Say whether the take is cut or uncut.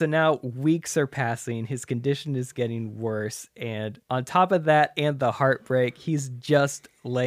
cut